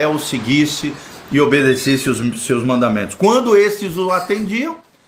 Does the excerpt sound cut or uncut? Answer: uncut